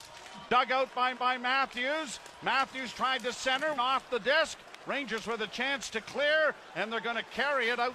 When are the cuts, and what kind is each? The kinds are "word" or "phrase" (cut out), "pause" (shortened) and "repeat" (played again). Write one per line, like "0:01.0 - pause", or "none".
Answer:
0:01.1 - repeat
0:03.8 - phrase